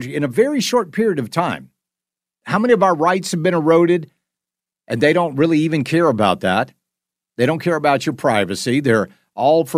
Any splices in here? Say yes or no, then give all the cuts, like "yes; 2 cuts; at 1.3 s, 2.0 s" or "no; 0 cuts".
no; 0 cuts